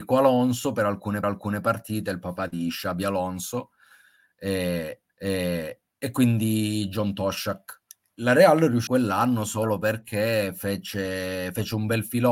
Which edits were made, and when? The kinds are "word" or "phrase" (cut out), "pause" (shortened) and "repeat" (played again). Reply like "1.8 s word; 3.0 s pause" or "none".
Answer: 1.2 s repeat; 5.1 s repeat; 7.9 s pause; 8.9 s phrase